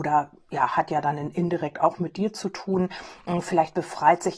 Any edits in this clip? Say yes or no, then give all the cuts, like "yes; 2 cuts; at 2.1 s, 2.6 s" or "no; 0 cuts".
no; 0 cuts